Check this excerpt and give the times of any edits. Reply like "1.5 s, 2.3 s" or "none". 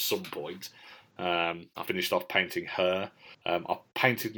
1.9 s, 3.3 s